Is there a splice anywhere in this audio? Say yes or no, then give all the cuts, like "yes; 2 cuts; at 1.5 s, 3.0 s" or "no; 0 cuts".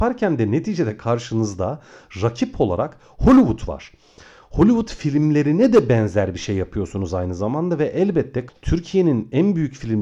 no; 0 cuts